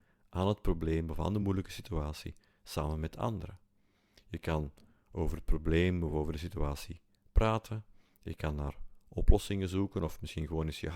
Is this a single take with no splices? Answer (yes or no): yes